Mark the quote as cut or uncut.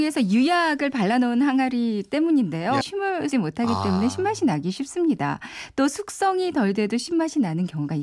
cut